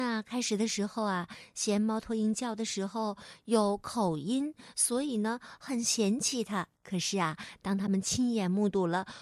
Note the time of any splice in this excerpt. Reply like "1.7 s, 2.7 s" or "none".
6.8 s